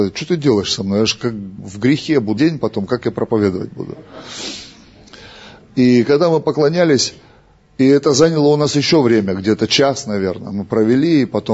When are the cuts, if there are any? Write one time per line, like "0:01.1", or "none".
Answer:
0:01.6
0:02.4